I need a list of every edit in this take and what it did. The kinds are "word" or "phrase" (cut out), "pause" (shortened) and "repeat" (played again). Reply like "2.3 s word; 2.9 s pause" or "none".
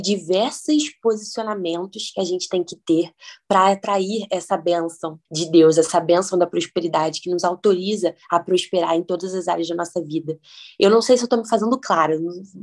5.3 s pause; 8.2 s pause